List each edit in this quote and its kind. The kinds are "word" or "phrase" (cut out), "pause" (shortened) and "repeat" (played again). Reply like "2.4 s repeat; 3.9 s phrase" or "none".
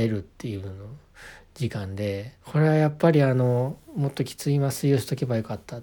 2.4 s pause